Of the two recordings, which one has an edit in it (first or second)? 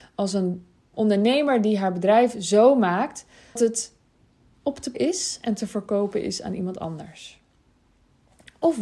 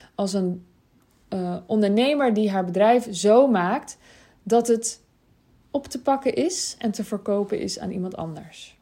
first